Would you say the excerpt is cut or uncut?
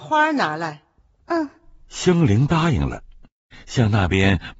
uncut